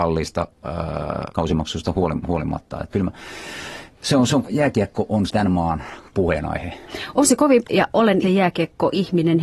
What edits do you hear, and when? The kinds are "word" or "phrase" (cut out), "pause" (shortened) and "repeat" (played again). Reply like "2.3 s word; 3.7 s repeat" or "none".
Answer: 1.3 s word; 2.9 s word; 4.4 s word; 5.3 s word; 6.1 s word; 7.6 s word; 8.2 s word